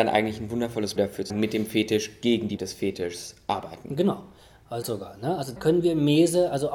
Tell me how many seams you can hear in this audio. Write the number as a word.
five